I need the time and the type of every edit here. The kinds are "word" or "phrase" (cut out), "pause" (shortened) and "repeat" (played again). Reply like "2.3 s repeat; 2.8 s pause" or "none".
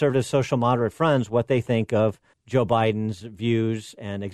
2.3 s pause